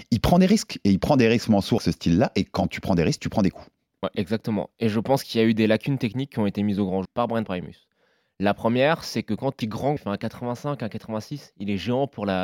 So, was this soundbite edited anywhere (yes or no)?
yes